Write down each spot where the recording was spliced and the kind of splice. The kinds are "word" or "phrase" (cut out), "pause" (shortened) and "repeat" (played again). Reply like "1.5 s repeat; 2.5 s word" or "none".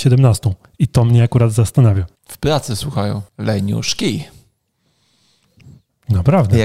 2.2 s pause; 3.3 s pause